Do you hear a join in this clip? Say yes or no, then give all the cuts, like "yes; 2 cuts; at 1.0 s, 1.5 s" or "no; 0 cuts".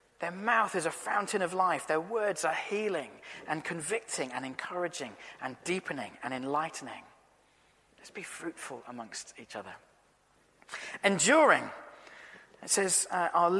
no; 0 cuts